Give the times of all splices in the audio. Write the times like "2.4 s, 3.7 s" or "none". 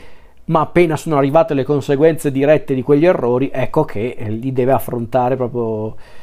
none